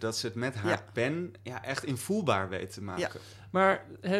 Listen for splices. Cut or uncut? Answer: uncut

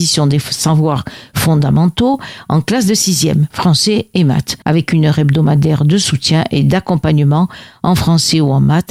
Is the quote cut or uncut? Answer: cut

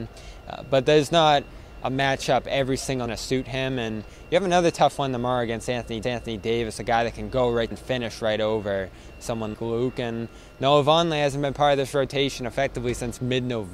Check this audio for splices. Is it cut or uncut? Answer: cut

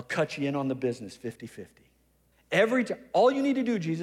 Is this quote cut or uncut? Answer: cut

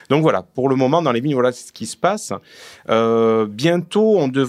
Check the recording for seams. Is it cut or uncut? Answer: uncut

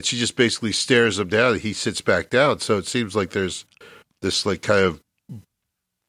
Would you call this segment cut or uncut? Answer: uncut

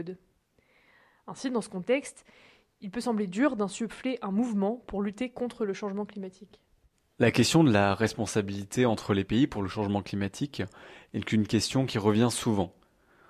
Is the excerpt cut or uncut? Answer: uncut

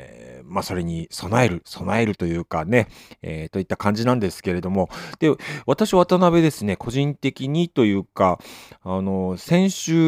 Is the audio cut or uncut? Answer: uncut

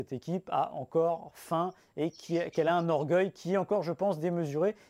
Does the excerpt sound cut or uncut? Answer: uncut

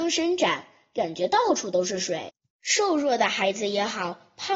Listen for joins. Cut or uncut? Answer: cut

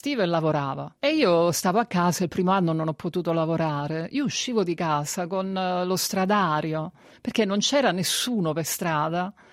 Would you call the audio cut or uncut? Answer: uncut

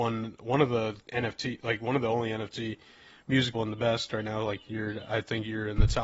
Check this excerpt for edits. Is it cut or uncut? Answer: cut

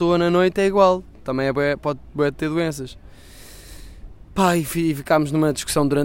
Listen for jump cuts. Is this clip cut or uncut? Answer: uncut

